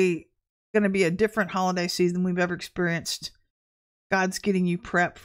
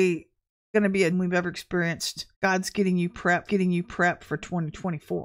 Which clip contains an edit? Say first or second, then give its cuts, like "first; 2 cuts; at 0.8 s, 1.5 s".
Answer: second; 3 cuts; at 1.1 s, 2.3 s, 3.4 s